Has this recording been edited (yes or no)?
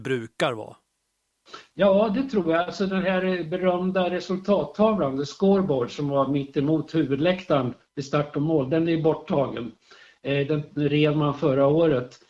no